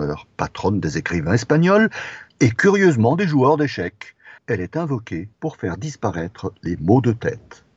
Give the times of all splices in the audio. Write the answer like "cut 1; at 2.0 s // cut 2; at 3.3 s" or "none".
cut 1; at 2.3 s // cut 2; at 4.4 s // cut 3; at 5.3 s // cut 4; at 6.5 s